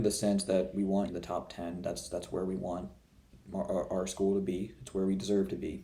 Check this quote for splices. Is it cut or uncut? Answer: cut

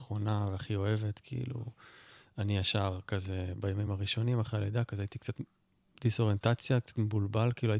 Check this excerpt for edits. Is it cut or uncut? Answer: uncut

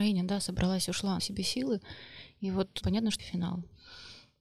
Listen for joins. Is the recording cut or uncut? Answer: cut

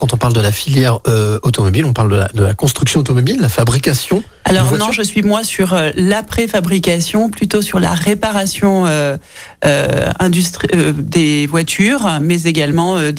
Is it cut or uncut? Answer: uncut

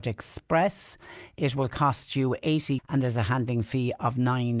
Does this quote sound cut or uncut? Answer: cut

